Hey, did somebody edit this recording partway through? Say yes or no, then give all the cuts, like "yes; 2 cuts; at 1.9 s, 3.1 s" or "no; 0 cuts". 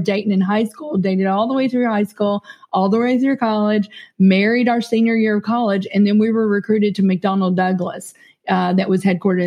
no; 0 cuts